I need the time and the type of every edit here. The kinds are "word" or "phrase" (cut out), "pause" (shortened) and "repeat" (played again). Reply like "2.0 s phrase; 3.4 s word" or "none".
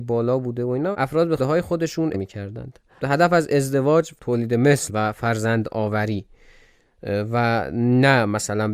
0.9 s word; 1.4 s word; 2.1 s word; 3.0 s word; 4.2 s word; 4.9 s word